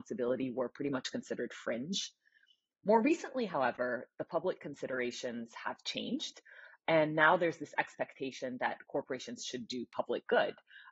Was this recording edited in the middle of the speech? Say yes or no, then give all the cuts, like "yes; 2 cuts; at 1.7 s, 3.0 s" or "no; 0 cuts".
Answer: no; 0 cuts